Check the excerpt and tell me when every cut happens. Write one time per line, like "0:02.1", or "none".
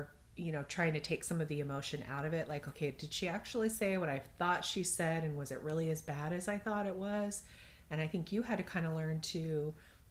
none